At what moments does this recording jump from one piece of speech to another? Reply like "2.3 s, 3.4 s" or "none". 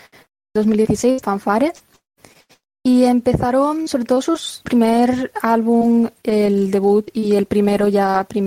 1.2 s, 4.7 s

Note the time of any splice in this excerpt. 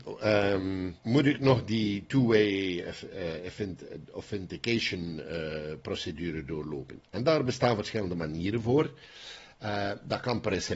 1.0 s

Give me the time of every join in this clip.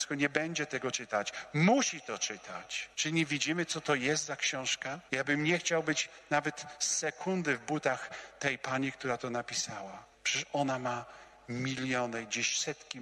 2.9 s, 5.1 s, 10.1 s

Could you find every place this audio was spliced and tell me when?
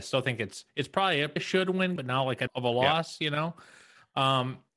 1.4 s, 2.0 s, 2.5 s

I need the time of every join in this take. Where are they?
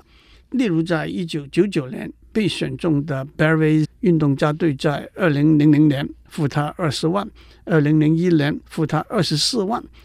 3.8 s

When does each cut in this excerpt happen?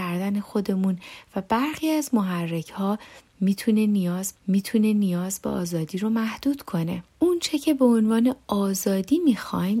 4.3 s, 7.1 s

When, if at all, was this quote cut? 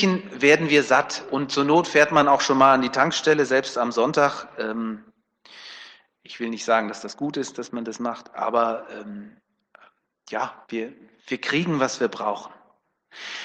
10.6 s

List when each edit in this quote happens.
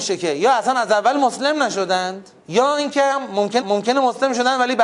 2.4 s, 3.6 s

